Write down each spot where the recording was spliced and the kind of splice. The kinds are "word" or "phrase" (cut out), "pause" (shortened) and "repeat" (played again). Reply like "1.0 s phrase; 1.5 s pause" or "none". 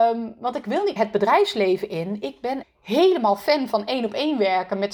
1.0 s word; 2.6 s word